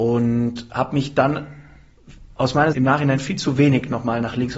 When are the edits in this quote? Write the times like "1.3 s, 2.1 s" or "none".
2.7 s